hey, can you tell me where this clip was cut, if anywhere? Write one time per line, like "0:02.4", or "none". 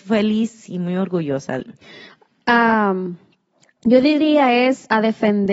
0:01.6